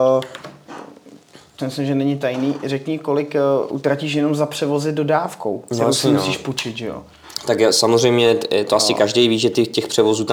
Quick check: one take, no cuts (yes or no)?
no